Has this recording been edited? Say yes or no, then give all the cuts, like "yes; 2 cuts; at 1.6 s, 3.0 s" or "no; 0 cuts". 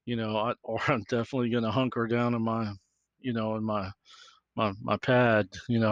no; 0 cuts